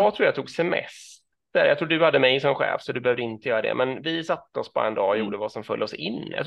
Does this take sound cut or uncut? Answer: uncut